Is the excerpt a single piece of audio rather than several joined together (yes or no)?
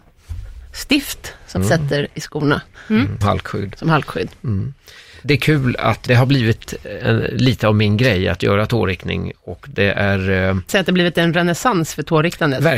no